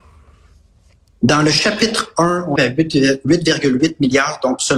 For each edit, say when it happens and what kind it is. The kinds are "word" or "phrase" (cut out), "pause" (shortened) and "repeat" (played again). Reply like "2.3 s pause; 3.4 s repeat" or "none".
2.6 s word